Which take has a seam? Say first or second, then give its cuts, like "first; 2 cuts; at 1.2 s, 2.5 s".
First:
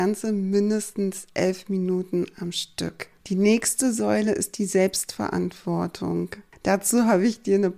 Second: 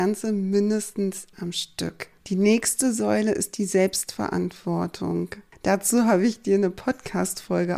second; 1 cut; at 1.3 s